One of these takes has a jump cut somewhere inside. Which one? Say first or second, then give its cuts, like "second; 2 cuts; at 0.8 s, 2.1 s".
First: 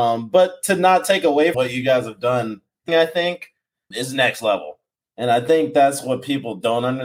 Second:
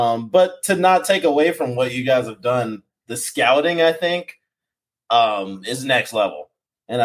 first; 3 cuts; at 1.5 s, 2.9 s, 3.9 s